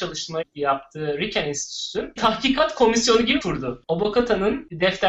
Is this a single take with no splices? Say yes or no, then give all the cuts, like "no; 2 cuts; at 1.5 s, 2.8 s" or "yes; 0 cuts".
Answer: no; 2 cuts; at 2.2 s, 3.4 s